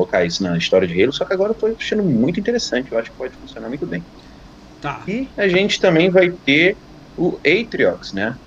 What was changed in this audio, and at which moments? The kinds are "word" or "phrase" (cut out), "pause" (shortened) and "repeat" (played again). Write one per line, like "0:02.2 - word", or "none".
none